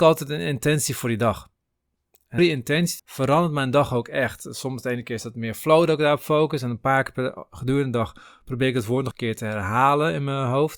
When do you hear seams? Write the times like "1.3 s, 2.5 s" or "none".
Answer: 2.4 s, 3.0 s, 9.1 s